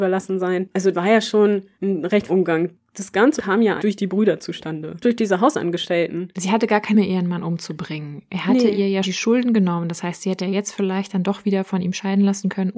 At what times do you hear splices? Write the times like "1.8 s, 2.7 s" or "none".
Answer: 0.9 s, 1.7 s, 2.3 s, 3.4 s, 3.8 s, 5.0 s, 6.9 s, 9.0 s, 10.4 s